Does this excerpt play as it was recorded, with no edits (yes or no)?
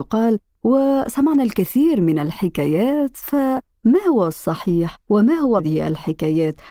no